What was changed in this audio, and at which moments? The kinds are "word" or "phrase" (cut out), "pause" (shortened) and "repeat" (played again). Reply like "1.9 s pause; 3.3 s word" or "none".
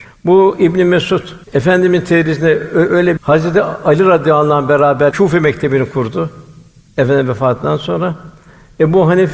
1.4 s pause; 3.2 s phrase; 5.1 s word